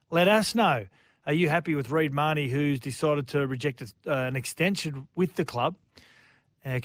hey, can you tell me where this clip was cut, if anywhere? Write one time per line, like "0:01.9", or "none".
none